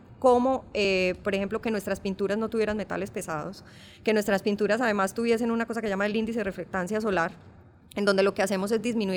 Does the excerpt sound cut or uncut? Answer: uncut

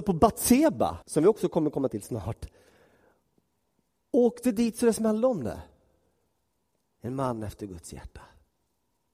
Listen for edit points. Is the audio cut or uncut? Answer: cut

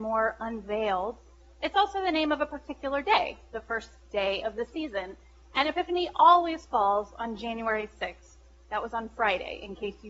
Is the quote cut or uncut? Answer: uncut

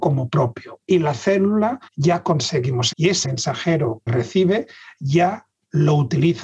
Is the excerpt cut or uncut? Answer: cut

